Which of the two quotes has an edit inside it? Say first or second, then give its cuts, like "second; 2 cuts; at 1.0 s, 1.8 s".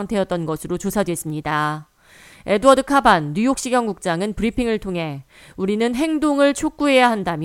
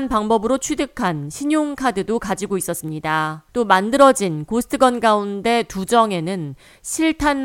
second; 1 cut; at 3.5 s